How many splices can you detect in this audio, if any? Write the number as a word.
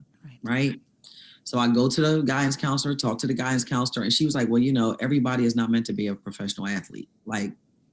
zero